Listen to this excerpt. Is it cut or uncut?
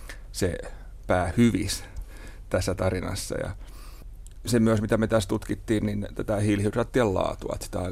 cut